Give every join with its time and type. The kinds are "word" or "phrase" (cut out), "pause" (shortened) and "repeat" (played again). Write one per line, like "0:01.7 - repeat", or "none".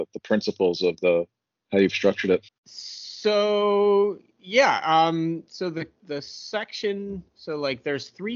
0:02.5 - pause
0:06.0 - word
0:07.3 - pause